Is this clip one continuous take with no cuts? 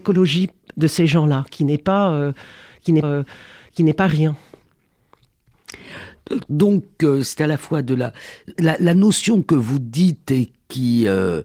no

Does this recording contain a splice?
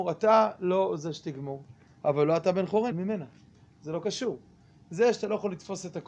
yes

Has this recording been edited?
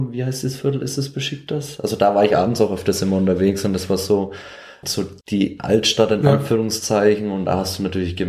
yes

